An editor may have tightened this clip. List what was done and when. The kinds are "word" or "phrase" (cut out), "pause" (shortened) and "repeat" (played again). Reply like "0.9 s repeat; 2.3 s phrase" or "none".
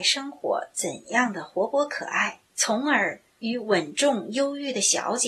2.5 s pause